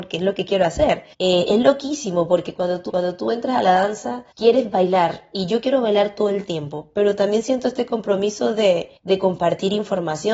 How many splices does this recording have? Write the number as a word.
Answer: four